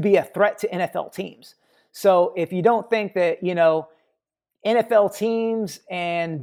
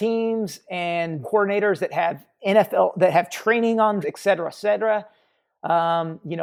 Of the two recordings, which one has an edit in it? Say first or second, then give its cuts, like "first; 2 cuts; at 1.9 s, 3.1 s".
second; 2 cuts; at 1.2 s, 4.0 s